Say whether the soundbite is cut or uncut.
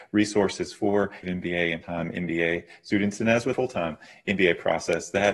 cut